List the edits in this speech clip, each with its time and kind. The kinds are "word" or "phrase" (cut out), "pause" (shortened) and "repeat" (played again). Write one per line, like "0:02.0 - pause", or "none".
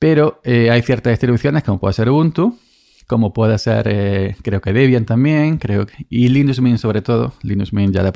none